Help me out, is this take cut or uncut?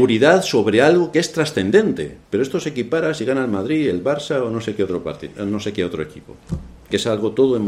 cut